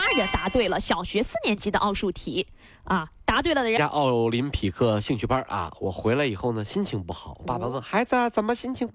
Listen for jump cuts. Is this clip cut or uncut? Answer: uncut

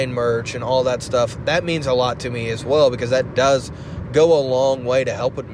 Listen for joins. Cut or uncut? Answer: uncut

